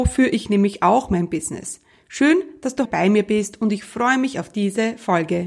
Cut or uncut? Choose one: cut